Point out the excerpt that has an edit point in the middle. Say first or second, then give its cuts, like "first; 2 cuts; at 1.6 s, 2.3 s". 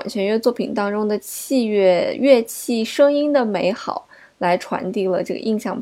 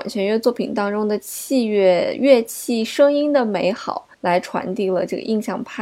second; 1 cut; at 4.1 s